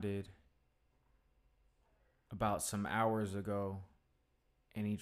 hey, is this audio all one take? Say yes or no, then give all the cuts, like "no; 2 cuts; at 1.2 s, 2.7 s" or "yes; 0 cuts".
yes; 0 cuts